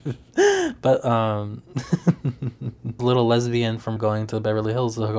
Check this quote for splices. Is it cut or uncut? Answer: cut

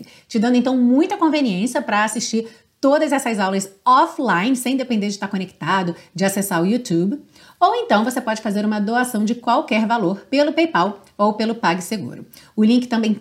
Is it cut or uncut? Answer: uncut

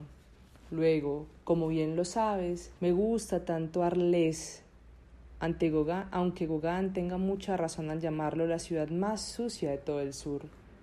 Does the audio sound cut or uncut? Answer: cut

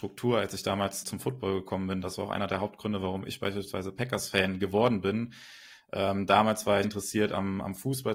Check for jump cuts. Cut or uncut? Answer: cut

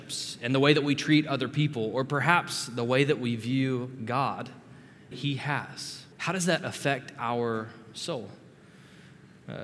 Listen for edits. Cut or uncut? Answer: cut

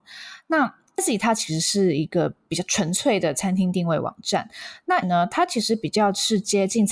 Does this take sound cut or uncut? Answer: cut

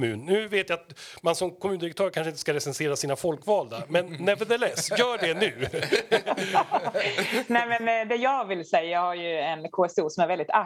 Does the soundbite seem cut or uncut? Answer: uncut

